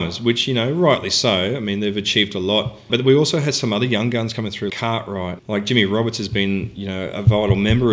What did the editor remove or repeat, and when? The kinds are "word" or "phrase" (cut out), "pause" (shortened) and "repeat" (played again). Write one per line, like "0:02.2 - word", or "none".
0:02.9 - word
0:04.7 - word
0:05.4 - word